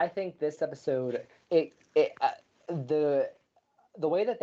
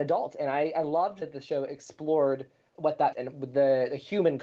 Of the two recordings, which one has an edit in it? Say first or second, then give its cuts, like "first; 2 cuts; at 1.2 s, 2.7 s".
second; 3 cuts; at 1.2 s, 2.7 s, 3.1 s